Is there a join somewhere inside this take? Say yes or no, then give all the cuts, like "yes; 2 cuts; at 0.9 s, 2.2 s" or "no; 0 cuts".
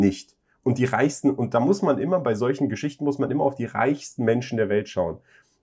no; 0 cuts